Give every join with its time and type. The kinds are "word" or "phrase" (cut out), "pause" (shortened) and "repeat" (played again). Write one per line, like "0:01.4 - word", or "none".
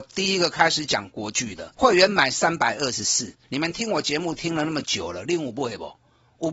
0:01.7 - pause
0:03.4 - pause